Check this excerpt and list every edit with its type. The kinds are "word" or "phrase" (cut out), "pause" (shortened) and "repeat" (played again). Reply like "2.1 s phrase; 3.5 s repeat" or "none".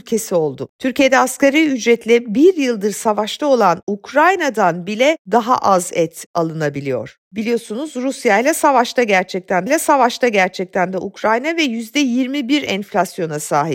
9.7 s repeat